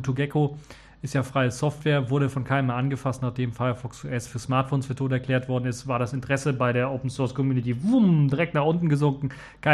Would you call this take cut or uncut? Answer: uncut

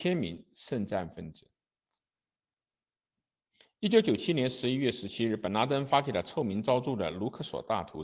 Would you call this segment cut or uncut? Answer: uncut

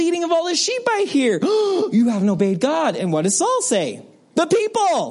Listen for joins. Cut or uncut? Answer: uncut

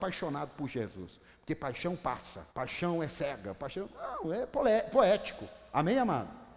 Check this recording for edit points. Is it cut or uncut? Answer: cut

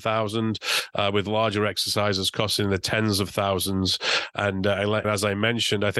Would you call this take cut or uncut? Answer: cut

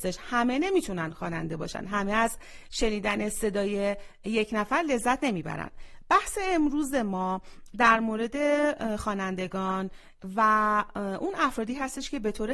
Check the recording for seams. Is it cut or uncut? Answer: uncut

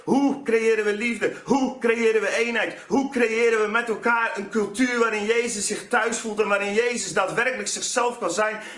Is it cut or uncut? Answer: uncut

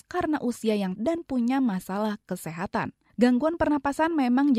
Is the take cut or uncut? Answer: cut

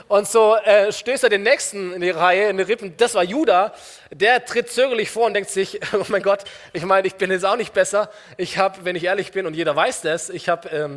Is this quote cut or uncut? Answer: uncut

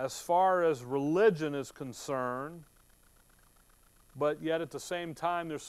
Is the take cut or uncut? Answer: uncut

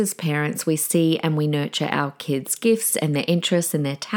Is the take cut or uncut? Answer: uncut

